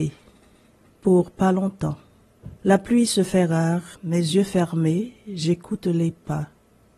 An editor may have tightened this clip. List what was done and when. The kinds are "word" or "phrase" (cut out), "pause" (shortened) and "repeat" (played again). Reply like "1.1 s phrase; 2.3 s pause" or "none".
2.6 s pause; 3.9 s pause